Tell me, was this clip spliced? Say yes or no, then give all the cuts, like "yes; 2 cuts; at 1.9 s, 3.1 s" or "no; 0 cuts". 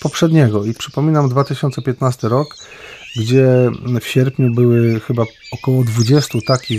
no; 0 cuts